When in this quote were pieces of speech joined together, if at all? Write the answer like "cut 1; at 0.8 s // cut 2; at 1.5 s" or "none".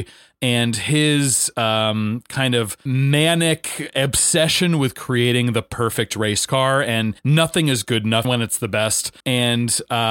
cut 1; at 7.2 s // cut 2; at 8.2 s // cut 3; at 9.2 s